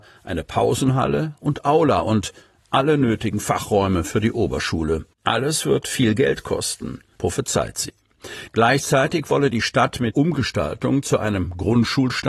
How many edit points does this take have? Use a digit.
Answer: 2